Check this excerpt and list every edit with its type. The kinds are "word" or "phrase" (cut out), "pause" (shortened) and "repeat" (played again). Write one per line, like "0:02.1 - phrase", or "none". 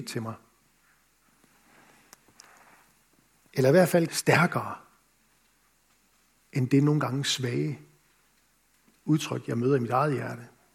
0:04.1 - phrase